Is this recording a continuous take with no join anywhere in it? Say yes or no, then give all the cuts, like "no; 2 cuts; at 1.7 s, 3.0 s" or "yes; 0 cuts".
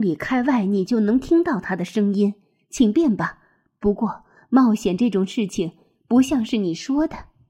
yes; 0 cuts